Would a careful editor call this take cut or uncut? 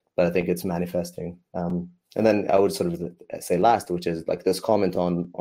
uncut